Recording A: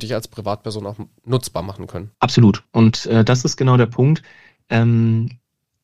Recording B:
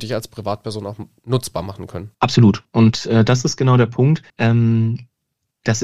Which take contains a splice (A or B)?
B